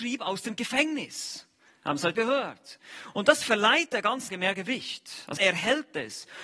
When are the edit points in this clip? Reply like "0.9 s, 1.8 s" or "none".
2.1 s, 4.3 s, 5.4 s